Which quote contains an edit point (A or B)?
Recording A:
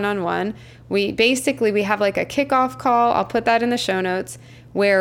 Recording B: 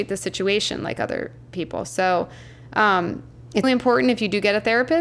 B